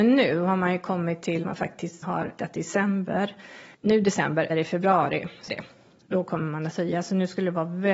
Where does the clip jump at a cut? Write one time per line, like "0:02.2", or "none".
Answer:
0:01.4
0:02.0
0:02.4
0:03.7
0:04.5
0:05.5